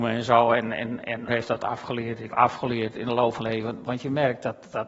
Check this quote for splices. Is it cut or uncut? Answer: cut